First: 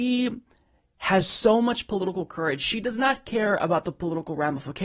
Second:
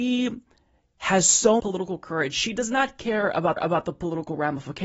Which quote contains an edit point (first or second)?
second